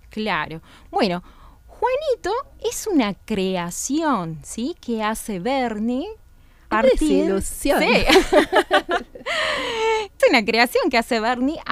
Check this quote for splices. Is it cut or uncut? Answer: cut